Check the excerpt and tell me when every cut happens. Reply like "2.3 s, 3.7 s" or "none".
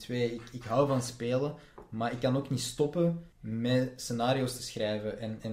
3.3 s